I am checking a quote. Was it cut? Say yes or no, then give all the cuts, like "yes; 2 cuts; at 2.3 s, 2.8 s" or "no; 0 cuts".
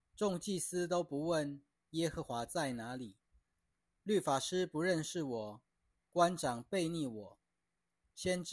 no; 0 cuts